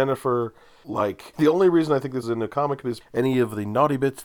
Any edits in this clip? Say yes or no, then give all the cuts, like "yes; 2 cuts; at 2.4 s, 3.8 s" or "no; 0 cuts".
yes; 3 cuts; at 1.3 s, 2.2 s, 3.0 s